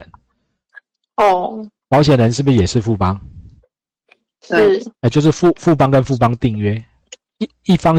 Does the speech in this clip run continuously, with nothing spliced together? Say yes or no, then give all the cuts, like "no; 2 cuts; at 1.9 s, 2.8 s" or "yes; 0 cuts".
no; 2 cuts; at 1.8 s, 4.9 s